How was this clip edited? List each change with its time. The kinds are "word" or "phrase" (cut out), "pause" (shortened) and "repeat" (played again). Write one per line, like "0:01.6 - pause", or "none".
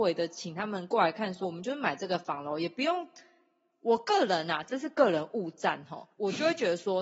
0:01.4 - phrase
0:06.1 - pause